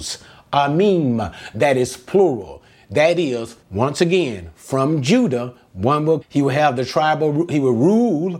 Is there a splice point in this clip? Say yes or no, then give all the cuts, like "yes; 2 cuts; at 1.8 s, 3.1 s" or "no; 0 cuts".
yes; 2 cuts; at 3.6 s, 6.2 s